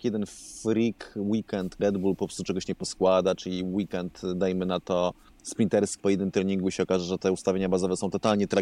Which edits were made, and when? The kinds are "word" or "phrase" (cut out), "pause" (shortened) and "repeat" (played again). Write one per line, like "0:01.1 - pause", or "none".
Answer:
0:01.8 - word
0:06.0 - word